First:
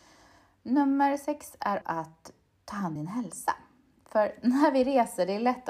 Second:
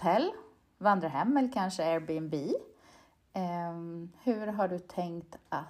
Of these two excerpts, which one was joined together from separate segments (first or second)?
first